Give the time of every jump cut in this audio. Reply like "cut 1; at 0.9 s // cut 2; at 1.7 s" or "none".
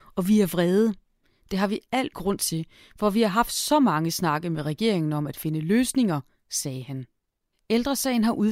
cut 1; at 2.1 s